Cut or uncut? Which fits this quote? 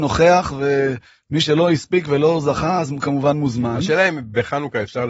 uncut